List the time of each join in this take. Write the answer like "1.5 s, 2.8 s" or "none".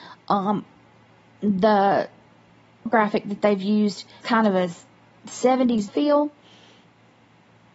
2.9 s, 4.2 s, 5.9 s